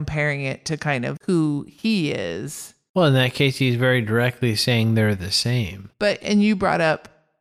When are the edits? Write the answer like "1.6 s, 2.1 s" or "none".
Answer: 1.2 s, 5.9 s